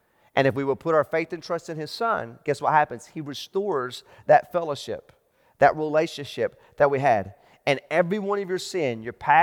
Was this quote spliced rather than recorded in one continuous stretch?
no; 0 cuts

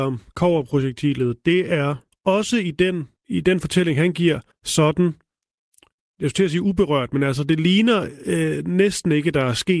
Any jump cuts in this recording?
yes; 3 cuts; at 2.1 s, 3.2 s, 4.5 s

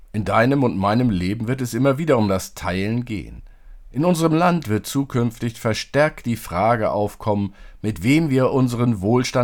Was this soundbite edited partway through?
no; 0 cuts

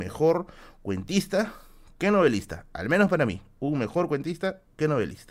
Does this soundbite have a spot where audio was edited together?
no; 0 cuts

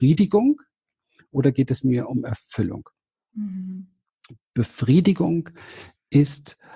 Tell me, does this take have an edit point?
no; 0 cuts

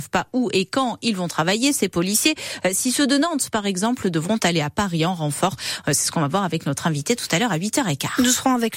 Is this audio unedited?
yes; 0 cuts

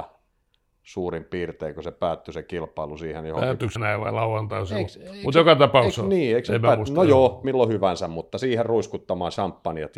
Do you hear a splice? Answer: yes; 2 cuts; at 3.8 s, 7.4 s

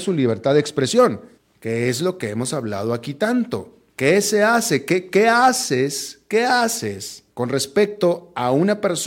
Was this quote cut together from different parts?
yes; 3 cuts; at 1.4 s, 3.9 s, 7.3 s

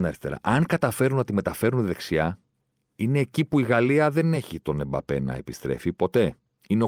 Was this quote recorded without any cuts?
yes; 0 cuts

